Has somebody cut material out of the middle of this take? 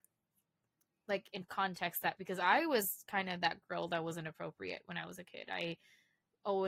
yes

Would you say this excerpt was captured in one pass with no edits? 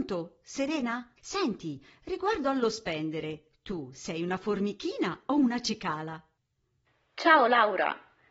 no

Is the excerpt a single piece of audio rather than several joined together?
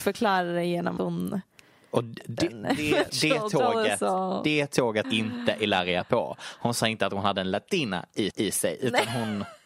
no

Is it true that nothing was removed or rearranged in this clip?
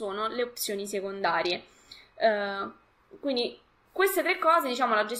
yes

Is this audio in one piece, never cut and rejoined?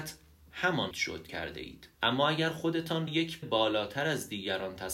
no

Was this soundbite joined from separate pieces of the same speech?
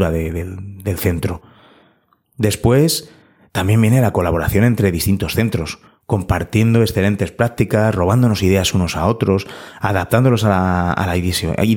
no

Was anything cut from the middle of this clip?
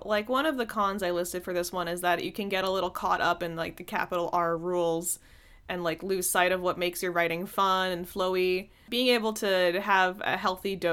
no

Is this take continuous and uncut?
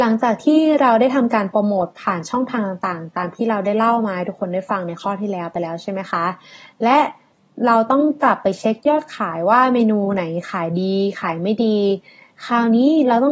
yes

